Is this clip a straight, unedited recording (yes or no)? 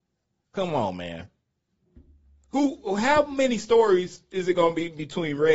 yes